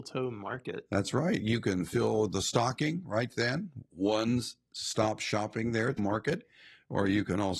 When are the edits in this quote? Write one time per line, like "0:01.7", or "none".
0:06.0